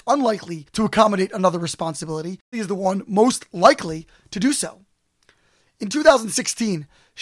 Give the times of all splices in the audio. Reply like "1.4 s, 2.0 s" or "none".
2.5 s